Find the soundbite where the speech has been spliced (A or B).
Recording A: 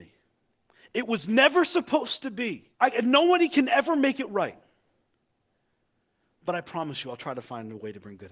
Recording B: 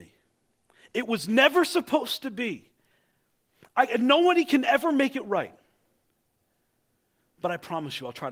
A